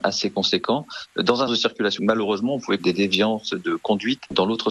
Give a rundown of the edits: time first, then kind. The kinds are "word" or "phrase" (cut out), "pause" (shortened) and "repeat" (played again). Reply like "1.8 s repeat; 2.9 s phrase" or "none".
1.5 s word; 2.0 s word; 2.8 s word